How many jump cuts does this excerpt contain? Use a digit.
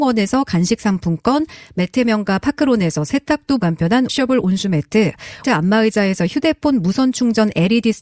3